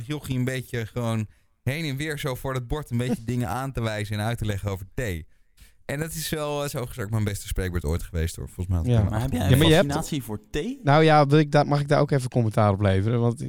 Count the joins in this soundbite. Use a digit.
0